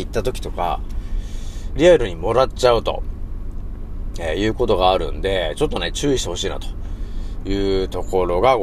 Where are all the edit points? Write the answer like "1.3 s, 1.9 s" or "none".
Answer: 1.8 s